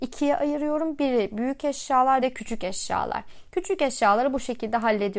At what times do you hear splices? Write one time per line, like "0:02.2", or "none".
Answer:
0:02.2